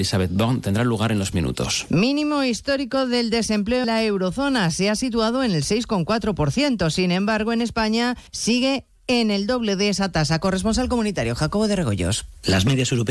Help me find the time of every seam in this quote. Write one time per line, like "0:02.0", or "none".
0:01.3
0:03.8
0:08.3

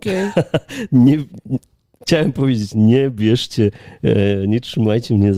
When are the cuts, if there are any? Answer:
none

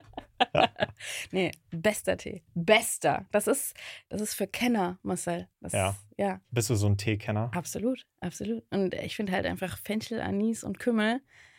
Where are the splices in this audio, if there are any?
0:05.5

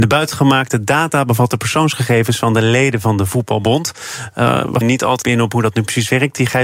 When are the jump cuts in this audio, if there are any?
0:04.8
0:05.2

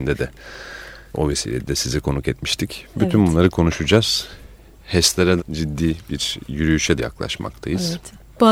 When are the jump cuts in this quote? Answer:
0:01.1
0:05.4
0:07.0

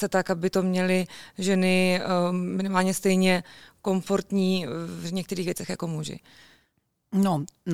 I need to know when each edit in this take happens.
none

